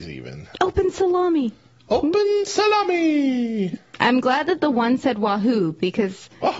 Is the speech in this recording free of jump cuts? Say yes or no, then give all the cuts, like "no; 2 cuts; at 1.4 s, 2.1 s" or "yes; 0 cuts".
yes; 0 cuts